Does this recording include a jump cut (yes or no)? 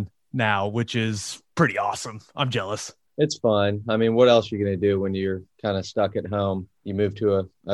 yes